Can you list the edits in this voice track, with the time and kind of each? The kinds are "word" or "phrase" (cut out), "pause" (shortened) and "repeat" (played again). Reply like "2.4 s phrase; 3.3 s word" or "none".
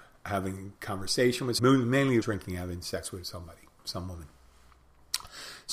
1.6 s word; 2.2 s phrase